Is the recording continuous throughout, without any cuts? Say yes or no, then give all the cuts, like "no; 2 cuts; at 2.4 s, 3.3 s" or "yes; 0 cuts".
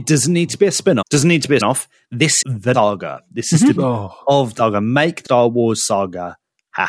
no; 7 cuts; at 1.0 s, 1.6 s, 2.4 s, 2.7 s, 3.8 s, 4.6 s, 5.2 s